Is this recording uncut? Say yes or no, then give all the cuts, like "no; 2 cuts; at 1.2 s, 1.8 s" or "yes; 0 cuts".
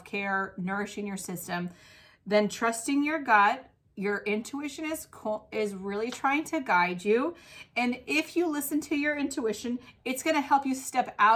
yes; 0 cuts